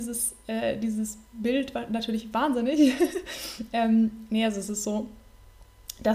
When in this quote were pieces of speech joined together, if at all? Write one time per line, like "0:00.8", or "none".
none